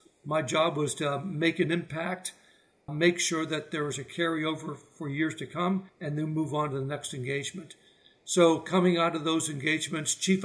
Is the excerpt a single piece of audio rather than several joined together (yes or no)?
no